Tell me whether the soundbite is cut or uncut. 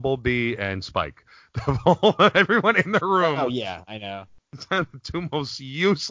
uncut